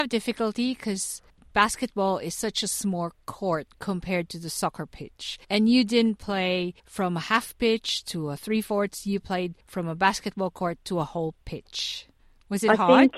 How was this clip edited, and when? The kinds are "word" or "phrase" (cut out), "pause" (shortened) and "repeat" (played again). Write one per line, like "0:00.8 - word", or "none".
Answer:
0:01.3 - pause
0:03.2 - pause
0:05.4 - pause
0:06.8 - pause
0:09.6 - pause
0:12.2 - pause